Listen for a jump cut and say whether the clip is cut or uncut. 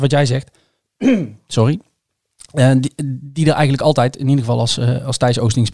uncut